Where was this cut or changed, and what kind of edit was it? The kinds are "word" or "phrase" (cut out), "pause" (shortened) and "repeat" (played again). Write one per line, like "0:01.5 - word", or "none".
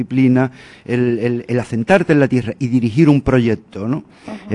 none